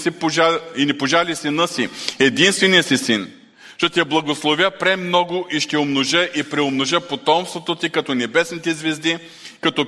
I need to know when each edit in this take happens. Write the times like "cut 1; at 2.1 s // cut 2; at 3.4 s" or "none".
none